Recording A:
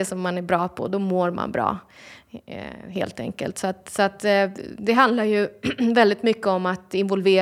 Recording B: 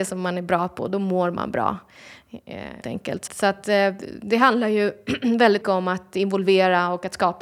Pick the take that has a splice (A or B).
B